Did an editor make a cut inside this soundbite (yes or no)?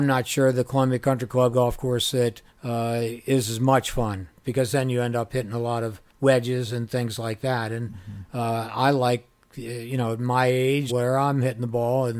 yes